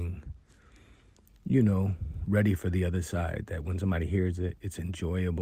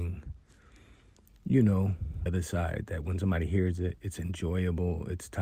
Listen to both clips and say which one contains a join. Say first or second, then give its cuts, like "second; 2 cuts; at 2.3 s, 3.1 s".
second; 1 cut; at 2.3 s